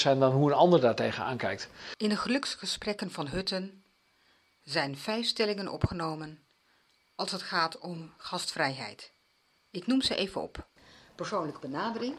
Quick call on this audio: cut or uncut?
uncut